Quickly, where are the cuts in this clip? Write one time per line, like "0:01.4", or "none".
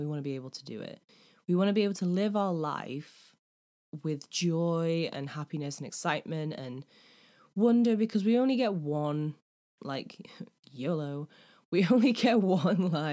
none